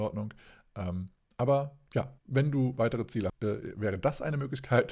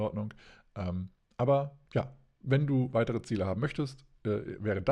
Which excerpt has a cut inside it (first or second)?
first